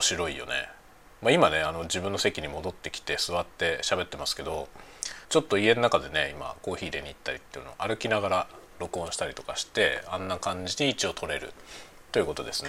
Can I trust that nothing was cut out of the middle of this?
no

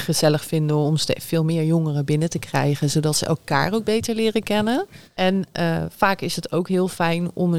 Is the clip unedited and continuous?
yes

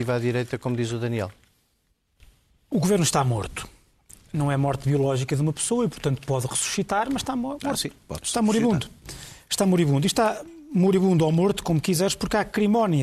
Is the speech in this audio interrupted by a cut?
no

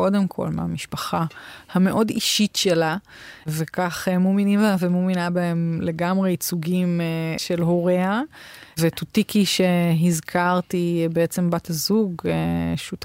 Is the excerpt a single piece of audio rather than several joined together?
yes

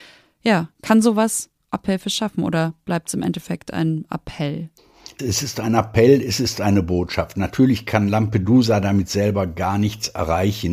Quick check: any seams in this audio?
no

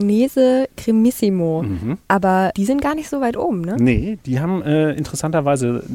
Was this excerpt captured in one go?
yes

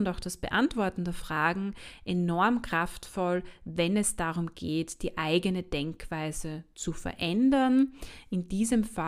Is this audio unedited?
yes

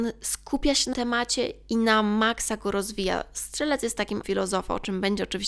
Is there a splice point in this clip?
yes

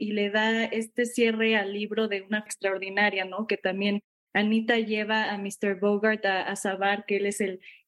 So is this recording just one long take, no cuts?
no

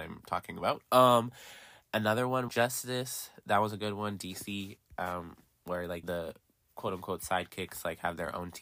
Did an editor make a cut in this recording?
yes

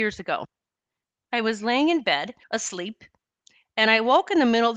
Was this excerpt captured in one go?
no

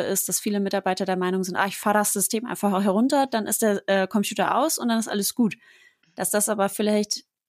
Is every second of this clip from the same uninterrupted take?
yes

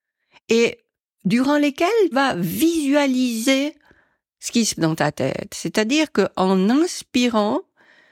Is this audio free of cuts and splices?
no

